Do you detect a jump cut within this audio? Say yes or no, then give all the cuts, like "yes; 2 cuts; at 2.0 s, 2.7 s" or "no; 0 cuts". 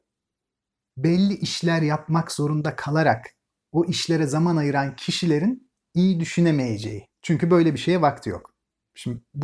yes; 1 cut; at 7.1 s